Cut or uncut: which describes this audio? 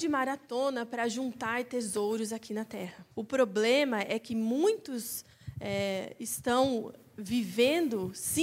cut